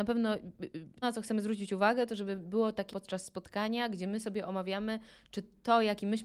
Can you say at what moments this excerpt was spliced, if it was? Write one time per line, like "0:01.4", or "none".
0:01.0
0:02.9